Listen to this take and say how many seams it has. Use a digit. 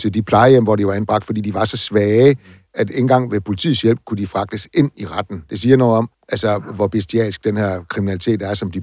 1